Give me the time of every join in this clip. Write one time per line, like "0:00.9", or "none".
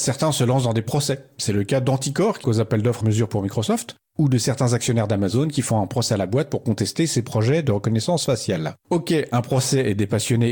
0:02.4
0:03.0
0:08.8